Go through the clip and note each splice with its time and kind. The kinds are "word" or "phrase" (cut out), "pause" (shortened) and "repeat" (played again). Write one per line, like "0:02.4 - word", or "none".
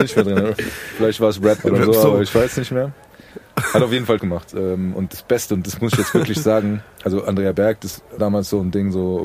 0:01.6 - word
0:04.2 - word
0:05.1 - word
0:08.2 - word